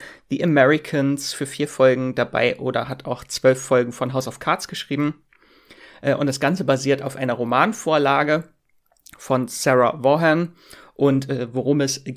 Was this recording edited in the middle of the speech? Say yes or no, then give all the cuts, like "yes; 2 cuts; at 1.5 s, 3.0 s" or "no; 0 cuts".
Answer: no; 0 cuts